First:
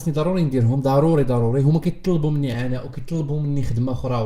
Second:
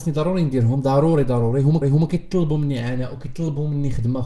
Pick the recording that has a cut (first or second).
second